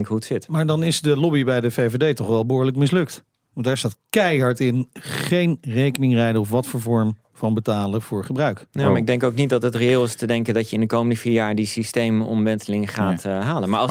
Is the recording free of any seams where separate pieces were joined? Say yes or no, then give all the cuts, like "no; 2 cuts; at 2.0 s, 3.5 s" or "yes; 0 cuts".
yes; 0 cuts